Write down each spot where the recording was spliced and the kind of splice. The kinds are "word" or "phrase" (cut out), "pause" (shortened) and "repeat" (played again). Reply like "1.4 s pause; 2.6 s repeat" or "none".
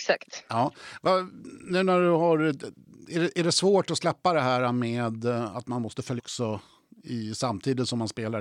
6.2 s word